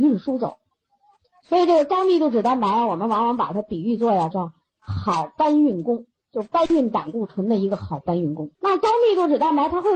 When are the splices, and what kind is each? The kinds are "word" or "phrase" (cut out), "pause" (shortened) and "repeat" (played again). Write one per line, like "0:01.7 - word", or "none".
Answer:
0:04.3 - word
0:08.5 - pause